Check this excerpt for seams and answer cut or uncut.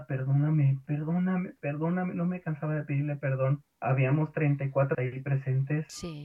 cut